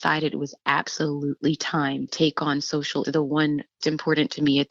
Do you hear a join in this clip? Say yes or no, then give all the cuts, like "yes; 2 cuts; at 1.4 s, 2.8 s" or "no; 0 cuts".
yes; 3 cuts; at 2.1 s, 3.0 s, 3.8 s